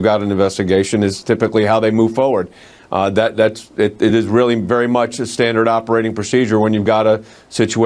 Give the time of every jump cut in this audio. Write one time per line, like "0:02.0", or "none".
none